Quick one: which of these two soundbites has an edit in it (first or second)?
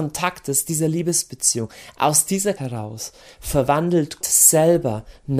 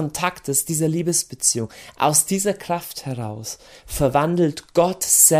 first